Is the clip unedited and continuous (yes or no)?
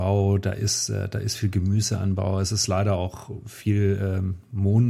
yes